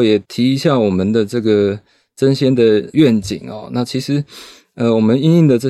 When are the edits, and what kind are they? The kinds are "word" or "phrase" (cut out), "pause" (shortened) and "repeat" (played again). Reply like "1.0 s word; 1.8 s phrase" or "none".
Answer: none